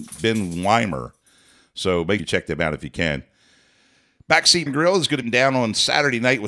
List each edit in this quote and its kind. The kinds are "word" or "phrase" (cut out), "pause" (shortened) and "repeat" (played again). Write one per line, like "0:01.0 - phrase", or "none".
0:02.2 - word
0:04.7 - word
0:05.2 - word